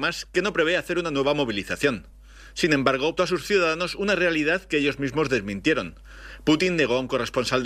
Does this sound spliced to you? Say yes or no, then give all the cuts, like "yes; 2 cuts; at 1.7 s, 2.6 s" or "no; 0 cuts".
yes; 1 cut; at 3.2 s